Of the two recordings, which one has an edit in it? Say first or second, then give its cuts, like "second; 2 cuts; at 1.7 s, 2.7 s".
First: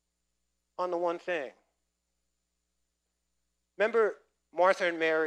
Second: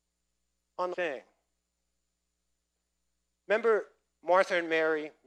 second; 1 cut; at 0.9 s